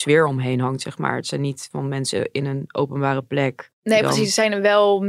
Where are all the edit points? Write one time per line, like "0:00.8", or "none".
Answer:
0:01.7
0:03.7